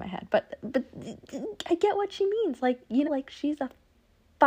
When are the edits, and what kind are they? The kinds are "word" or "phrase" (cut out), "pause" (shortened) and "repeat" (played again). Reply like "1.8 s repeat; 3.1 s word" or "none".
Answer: 3.0 s word

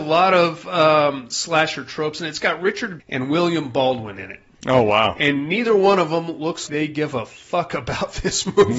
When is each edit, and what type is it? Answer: 3.0 s word; 6.7 s word

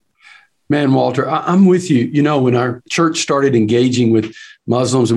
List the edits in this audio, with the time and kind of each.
none

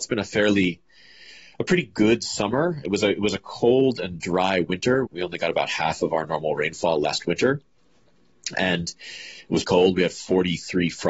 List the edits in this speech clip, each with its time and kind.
5.1 s word; 8.5 s word; 9.6 s word

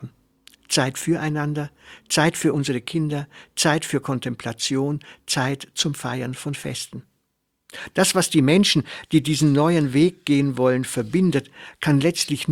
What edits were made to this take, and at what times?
none

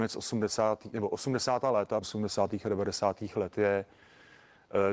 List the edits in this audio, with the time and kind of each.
2.0 s word

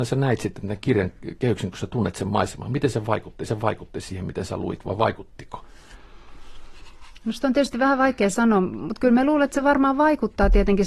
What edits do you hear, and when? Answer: 3.5 s repeat

